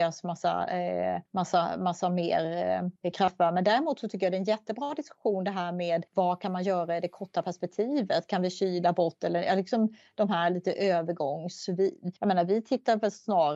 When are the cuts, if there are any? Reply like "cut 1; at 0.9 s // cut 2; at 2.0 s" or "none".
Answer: cut 1; at 1.3 s // cut 2; at 3.0 s // cut 3; at 6.1 s // cut 4; at 12.2 s